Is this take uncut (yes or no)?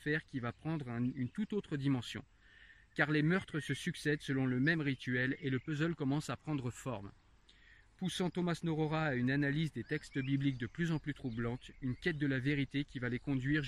yes